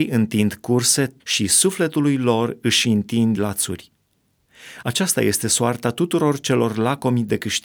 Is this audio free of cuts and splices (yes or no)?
no